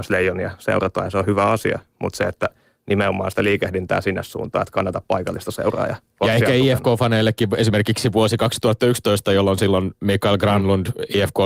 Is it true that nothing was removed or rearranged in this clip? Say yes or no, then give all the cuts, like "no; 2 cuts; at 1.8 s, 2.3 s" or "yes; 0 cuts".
yes; 0 cuts